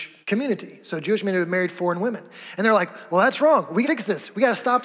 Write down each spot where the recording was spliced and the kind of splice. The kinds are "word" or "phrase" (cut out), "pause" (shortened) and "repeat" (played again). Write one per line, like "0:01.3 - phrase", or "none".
0:03.8 - phrase